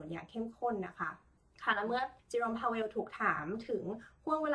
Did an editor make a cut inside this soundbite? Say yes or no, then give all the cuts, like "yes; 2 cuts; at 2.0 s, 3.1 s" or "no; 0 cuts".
yes; 2 cuts; at 1.4 s, 2.2 s